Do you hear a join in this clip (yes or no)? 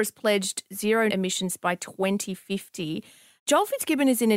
yes